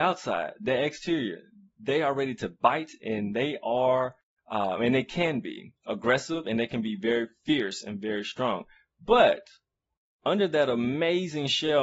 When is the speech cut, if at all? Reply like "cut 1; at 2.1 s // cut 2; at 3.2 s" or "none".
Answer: cut 1; at 5.8 s